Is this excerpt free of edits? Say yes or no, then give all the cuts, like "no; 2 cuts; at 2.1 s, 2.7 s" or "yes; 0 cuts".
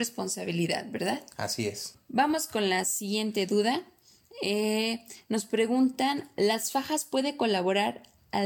yes; 0 cuts